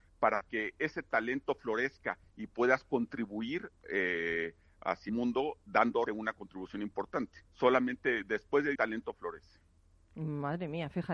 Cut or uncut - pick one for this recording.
cut